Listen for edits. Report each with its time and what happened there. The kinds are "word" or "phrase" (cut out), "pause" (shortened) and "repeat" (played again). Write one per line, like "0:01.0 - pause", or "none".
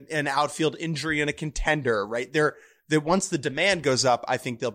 none